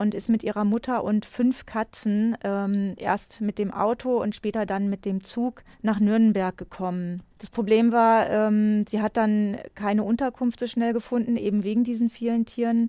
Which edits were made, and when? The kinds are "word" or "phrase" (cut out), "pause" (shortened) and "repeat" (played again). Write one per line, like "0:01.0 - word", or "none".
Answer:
0:05.7 - pause